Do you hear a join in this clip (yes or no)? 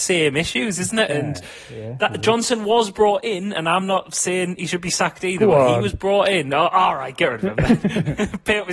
no